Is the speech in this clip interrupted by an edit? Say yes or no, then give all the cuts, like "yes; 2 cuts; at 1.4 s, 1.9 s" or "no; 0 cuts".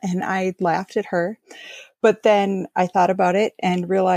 no; 0 cuts